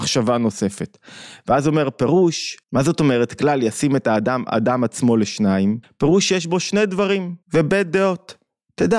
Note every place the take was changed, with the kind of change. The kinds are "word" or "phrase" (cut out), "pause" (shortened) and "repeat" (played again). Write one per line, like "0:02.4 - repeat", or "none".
0:02.6 - pause
0:05.8 - pause
0:07.4 - pause